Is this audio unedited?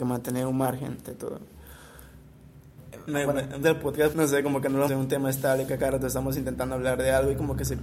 no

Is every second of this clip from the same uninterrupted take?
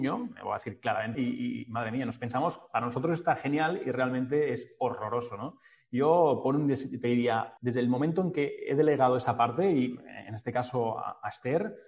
no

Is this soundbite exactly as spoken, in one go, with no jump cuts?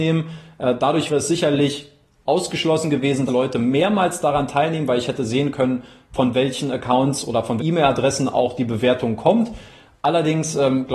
no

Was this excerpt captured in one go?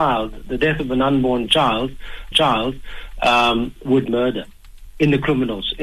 no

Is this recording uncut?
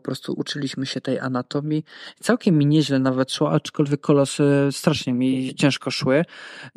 yes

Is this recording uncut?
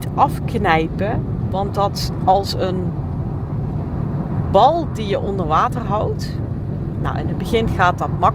no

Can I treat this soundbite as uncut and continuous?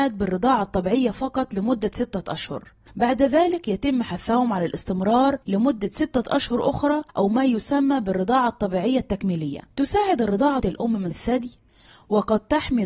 no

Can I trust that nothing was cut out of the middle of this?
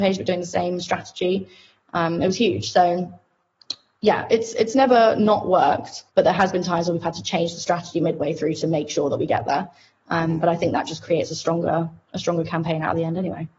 no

